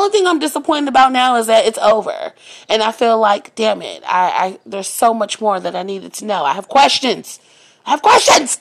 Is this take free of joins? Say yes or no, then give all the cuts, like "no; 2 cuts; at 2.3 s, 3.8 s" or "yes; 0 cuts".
yes; 0 cuts